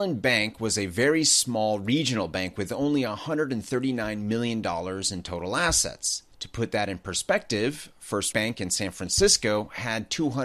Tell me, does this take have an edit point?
yes; 2 cuts; at 6.3 s, 8.3 s

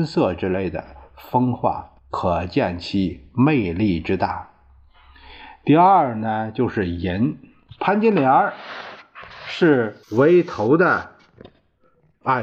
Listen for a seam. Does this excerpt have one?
yes; 2 cuts; at 2.0 s, 10.0 s

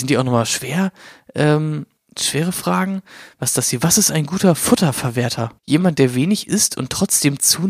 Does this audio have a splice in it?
yes; 2 cuts; at 2.0 s, 5.6 s

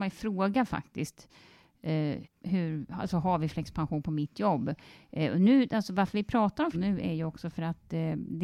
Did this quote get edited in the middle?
yes; 2 cuts; at 2.2 s, 6.7 s

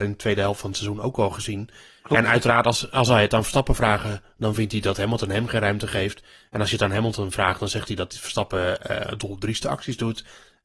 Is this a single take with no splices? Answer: yes; 0 cuts

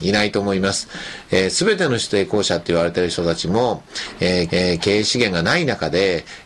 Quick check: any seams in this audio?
yes; 1 cut; at 4.5 s

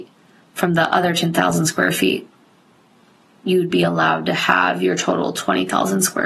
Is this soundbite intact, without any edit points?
yes; 0 cuts

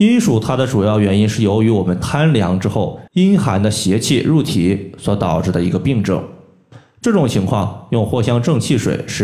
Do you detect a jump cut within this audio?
yes; 1 cut; at 3.1 s

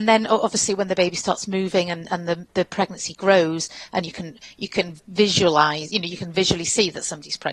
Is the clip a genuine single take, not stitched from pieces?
yes; 0 cuts

